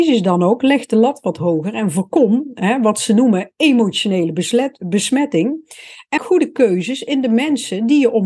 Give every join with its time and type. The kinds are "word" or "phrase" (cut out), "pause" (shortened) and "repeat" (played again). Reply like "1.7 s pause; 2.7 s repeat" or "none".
6.2 s word